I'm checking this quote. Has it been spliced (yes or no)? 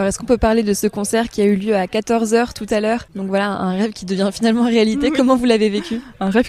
no